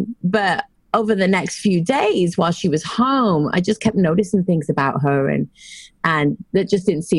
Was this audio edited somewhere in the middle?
no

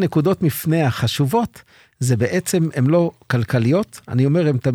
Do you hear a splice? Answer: no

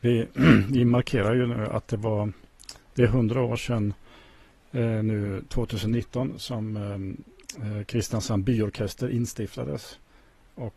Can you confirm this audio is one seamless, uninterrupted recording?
yes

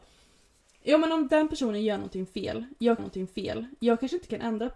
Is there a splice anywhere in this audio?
yes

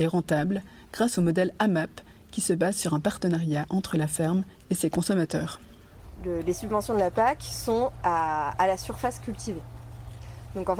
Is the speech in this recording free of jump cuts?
yes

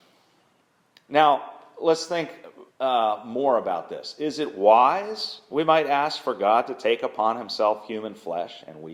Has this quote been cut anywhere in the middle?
yes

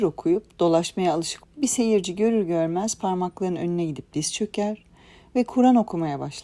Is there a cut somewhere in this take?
yes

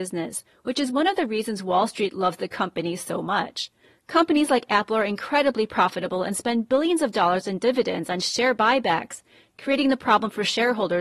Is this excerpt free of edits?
yes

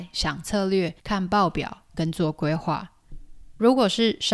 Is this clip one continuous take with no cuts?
no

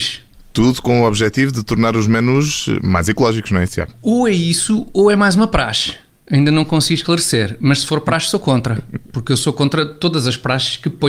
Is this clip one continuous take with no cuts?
yes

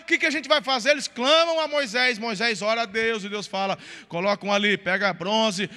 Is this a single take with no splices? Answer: yes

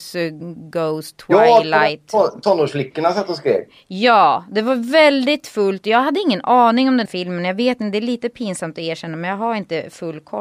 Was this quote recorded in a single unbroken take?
no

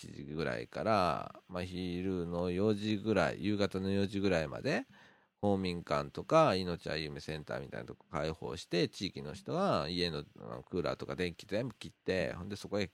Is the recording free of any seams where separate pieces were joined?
yes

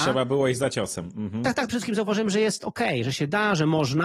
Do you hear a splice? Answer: yes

